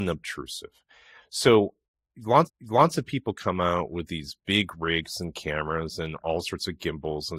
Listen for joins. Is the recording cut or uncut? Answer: cut